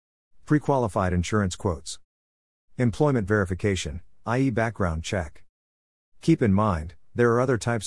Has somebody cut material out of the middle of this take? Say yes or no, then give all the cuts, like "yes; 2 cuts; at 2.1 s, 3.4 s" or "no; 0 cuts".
no; 0 cuts